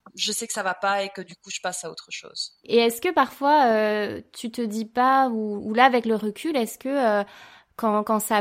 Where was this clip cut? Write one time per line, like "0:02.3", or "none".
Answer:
none